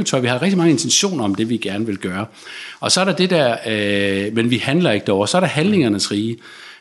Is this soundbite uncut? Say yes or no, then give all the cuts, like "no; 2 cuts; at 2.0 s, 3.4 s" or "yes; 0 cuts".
yes; 0 cuts